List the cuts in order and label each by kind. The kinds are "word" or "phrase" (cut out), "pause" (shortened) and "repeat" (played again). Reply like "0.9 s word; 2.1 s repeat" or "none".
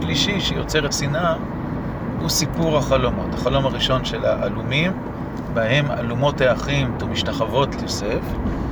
0.9 s word; 7.0 s word; 7.8 s word